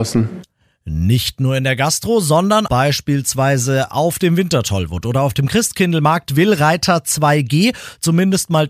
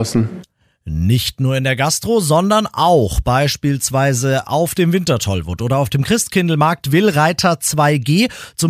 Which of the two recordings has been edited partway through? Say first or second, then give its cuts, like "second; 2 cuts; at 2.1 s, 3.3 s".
first; 1 cut; at 2.7 s